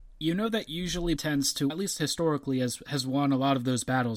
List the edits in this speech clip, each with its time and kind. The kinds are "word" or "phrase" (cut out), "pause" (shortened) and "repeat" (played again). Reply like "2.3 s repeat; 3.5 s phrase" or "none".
1.2 s word; 1.7 s word